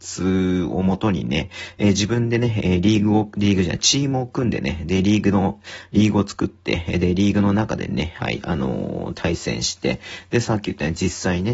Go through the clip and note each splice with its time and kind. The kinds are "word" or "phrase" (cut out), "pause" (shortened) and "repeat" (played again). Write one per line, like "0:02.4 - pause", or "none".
none